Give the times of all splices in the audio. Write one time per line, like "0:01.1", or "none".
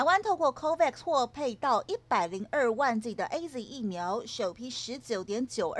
none

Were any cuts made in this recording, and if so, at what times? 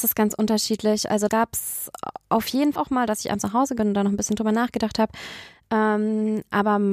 0:01.3
0:02.8
0:03.8

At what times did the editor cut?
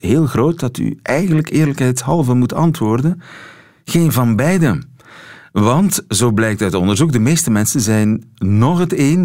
none

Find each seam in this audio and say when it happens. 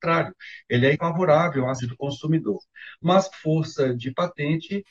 0:00.9
0:01.8
0:03.3

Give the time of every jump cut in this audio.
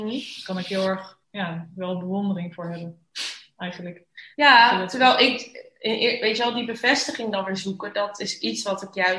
0:01.2
0:04.3

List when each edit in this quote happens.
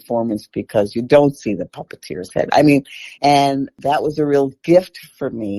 0:03.1

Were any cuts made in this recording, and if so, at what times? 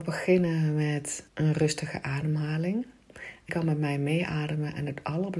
0:01.3
0:03.5

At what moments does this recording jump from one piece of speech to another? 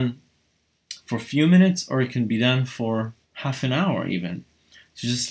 0:03.2

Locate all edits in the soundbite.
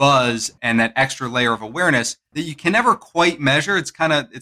none

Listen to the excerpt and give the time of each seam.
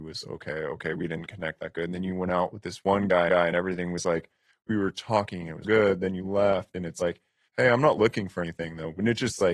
0:03.3
0:05.6

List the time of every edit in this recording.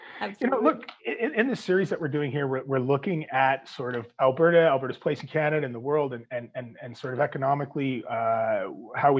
0:01.0

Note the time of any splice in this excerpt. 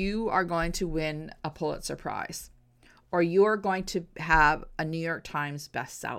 none

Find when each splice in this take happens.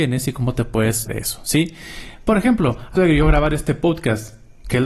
0:01.1
0:03.0

